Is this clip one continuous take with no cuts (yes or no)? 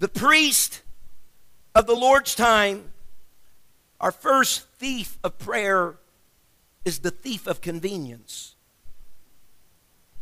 yes